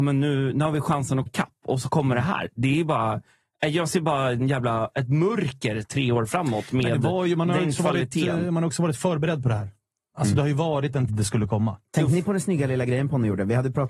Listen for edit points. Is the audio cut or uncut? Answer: cut